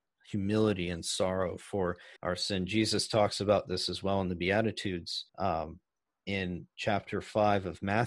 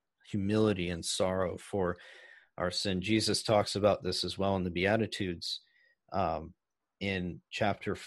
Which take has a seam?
first; 2 cuts; at 2.2 s, 5.3 s

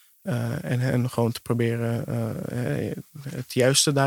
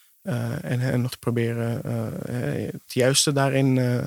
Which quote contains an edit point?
second; 2 cuts; at 1.1 s, 2.9 s

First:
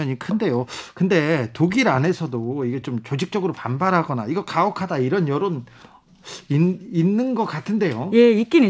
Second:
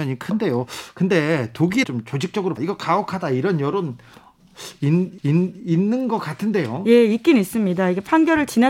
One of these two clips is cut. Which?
second; 3 cuts; at 1.8 s, 2.6 s, 5.2 s

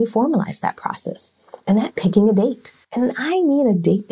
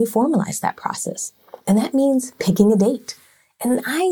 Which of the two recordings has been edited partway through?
first; 2 cuts; at 1.9 s, 2.8 s

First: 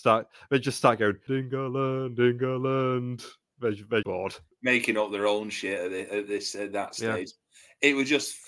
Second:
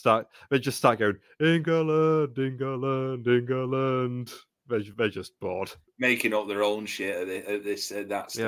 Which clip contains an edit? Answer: first; 2 cuts; at 1.3 s, 4.0 s

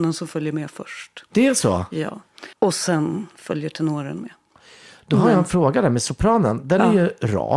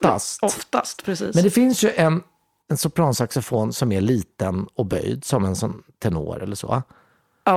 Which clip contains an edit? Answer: first; 1 cut; at 2.5 s

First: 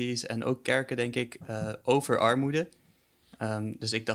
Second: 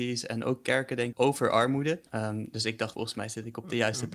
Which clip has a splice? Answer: second; 3 cuts; at 1.1 s, 2.1 s, 2.9 s

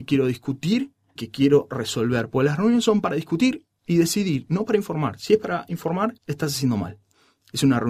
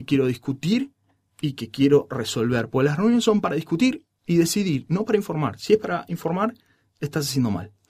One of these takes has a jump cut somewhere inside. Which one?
first; 2 cuts; at 1.2 s, 6.2 s

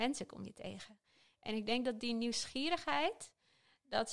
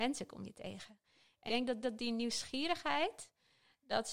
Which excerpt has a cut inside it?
second; 2 cuts; at 1.5 s, 1.8 s

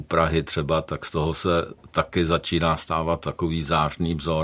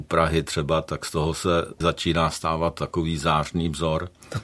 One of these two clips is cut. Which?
second; 1 cut; at 1.8 s

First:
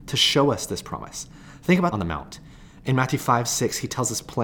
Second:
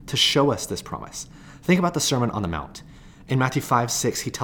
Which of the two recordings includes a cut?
first; 1 cut; at 1.9 s

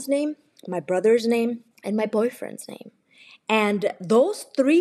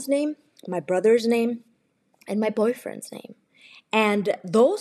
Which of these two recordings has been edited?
first; 1 cut; at 1.7 s

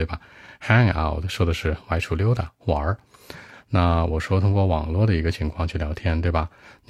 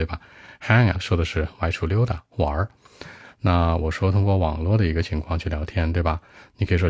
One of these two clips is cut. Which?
second; 1 cut; at 0.9 s

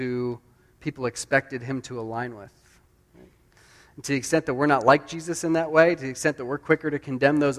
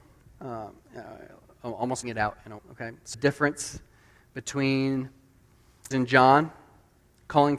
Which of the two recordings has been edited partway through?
second; 4 cuts; at 2.0 s, 2.6 s, 3.1 s, 5.9 s

